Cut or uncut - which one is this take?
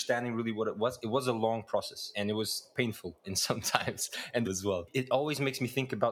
cut